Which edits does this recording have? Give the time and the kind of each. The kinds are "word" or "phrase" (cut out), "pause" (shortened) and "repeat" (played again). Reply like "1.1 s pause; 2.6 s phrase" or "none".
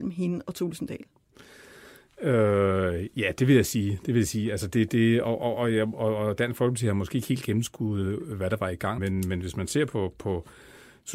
9.0 s word